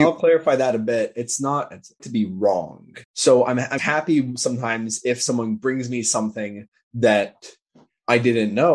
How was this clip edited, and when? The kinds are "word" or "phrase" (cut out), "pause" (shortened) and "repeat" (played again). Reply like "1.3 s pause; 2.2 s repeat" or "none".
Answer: 2.0 s phrase; 3.0 s pause; 3.8 s word